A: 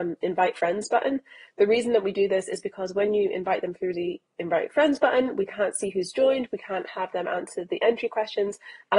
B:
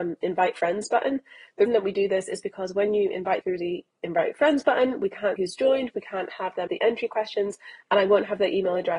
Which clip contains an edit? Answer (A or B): B